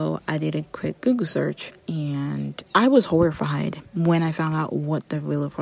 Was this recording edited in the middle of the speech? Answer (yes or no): yes